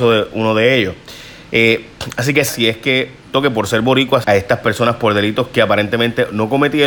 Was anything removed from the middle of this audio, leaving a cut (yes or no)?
yes